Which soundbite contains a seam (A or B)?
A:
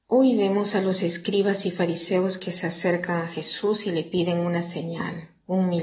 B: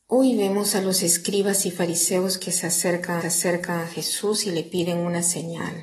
B